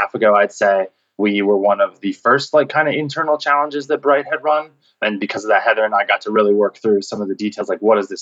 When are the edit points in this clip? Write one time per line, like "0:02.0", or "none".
none